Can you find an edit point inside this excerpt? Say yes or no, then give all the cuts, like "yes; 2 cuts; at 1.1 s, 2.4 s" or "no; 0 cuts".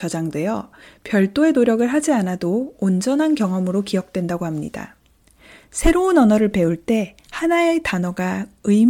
no; 0 cuts